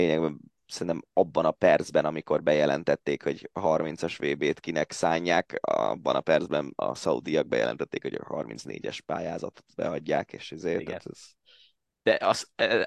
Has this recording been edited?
no; 0 cuts

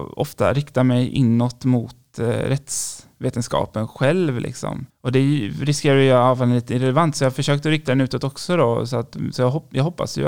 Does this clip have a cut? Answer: yes; 1 cut; at 4.9 s

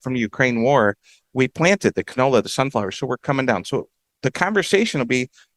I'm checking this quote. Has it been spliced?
no; 0 cuts

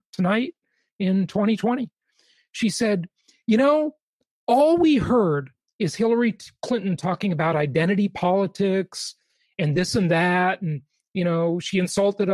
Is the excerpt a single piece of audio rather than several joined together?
yes; 0 cuts

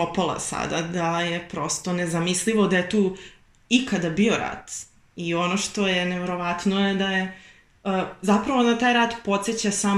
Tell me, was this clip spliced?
no; 0 cuts

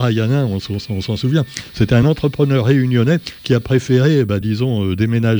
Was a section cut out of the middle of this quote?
no; 0 cuts

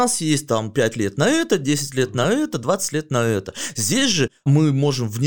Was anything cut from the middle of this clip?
no; 0 cuts

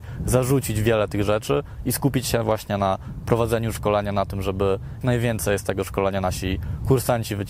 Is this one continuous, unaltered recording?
no; 1 cut; at 5.0 s

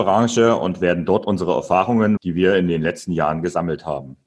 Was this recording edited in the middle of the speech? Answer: yes; 1 cut; at 2.2 s

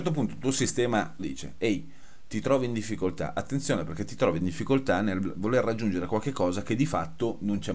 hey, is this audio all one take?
no; 1 cut; at 1.2 s

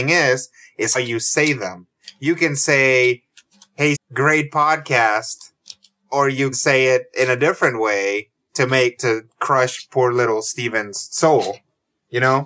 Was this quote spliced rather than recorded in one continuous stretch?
yes; 4 cuts; at 0.9 s, 3.9 s, 6.5 s, 9.0 s

